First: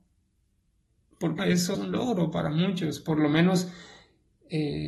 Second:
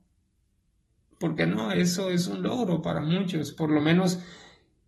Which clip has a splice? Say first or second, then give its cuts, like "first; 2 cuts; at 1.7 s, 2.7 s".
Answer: first; 2 cuts; at 1.4 s, 1.7 s